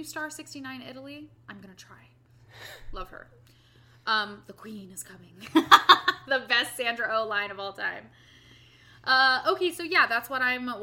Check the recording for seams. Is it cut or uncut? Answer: uncut